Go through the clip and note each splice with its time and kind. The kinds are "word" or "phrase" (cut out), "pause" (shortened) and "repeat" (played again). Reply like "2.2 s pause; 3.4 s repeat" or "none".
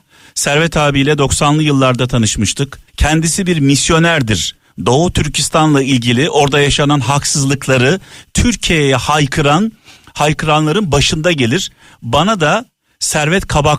2.9 s pause